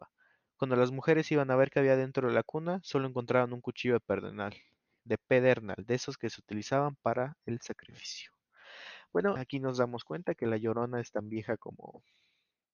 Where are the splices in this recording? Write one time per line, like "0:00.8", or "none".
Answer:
0:09.4